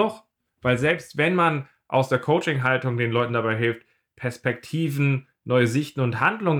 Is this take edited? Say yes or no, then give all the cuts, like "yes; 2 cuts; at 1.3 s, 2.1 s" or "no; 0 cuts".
no; 0 cuts